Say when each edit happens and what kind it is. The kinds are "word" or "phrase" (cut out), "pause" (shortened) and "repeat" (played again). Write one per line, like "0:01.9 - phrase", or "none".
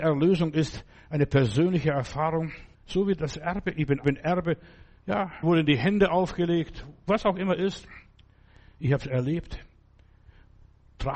0:02.7 - pause
0:04.0 - phrase
0:05.4 - word